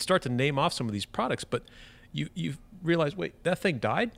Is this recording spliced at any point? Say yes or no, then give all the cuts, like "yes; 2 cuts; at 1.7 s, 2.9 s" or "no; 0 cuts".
no; 0 cuts